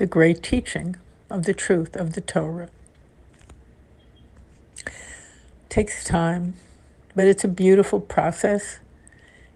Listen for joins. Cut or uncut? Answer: uncut